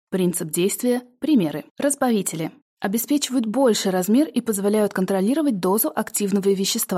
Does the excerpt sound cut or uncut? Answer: cut